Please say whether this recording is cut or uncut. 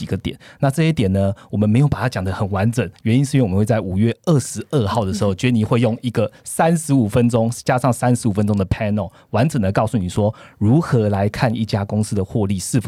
uncut